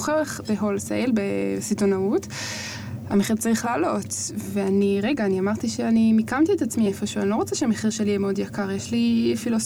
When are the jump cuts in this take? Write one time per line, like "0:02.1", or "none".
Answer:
none